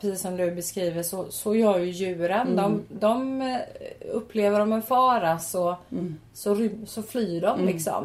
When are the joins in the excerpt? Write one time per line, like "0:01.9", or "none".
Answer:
none